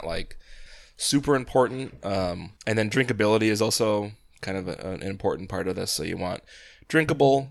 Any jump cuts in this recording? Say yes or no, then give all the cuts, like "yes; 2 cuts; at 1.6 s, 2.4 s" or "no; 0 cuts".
yes; 1 cut; at 2.6 s